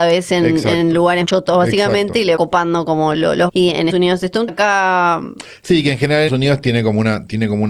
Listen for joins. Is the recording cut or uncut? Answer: cut